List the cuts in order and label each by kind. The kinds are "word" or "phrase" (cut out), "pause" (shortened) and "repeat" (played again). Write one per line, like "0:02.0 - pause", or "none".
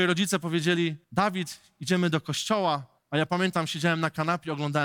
0:01.0 - pause
0:03.0 - pause